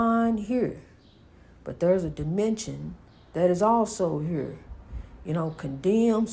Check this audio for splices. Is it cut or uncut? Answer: uncut